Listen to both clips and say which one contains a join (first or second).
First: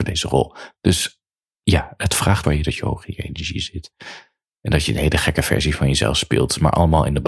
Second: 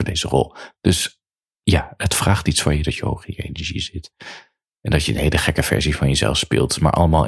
first